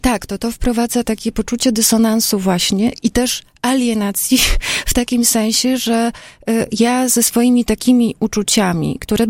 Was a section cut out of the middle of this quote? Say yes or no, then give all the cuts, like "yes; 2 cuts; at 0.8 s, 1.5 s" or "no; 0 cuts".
no; 0 cuts